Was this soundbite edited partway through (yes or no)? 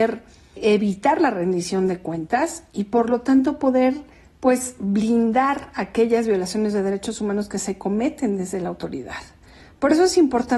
no